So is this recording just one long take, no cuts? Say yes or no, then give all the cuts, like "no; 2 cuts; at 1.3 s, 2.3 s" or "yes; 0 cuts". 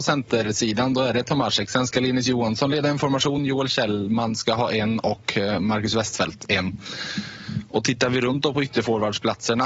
yes; 0 cuts